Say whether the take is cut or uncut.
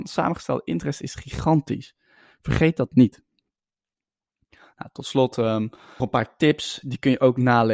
cut